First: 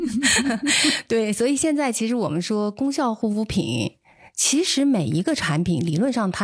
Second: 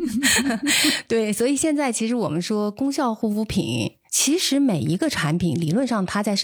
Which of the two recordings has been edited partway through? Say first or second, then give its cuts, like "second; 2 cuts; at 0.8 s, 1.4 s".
second; 1 cut; at 4.1 s